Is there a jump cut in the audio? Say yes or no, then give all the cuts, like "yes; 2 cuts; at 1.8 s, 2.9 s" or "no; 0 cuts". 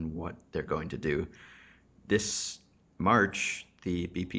no; 0 cuts